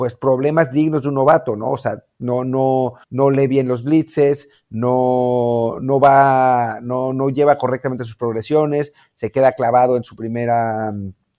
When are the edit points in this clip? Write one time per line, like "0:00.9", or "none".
0:03.0

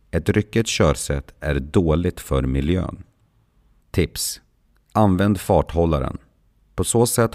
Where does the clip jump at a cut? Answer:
none

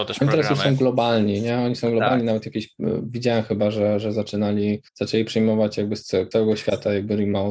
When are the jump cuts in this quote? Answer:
0:04.9
0:06.3

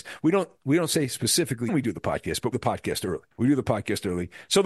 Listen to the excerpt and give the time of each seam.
0:01.7
0:02.5
0:03.3

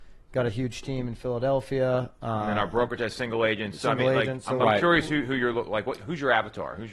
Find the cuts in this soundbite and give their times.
none

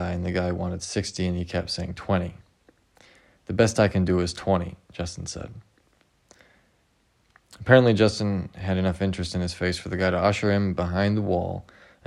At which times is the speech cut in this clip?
none

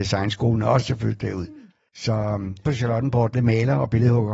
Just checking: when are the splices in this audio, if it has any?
0:02.6
0:03.3

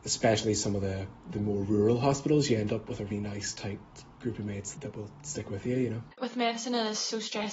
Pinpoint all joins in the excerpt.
0:03.1
0:04.8
0:06.1

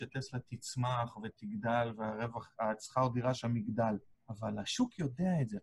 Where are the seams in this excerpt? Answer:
0:04.1

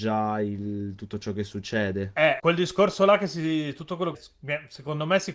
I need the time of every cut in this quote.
0:02.4
0:04.1

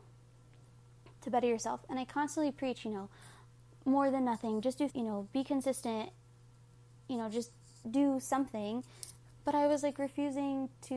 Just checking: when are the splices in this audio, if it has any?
0:04.9
0:07.8

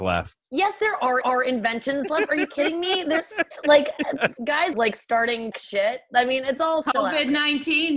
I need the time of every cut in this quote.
0:01.2
0:04.7
0:05.5

